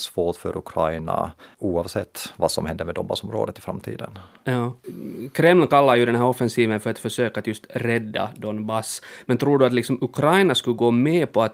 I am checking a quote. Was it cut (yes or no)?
yes